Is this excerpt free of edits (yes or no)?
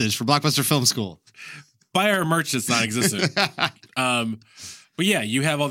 yes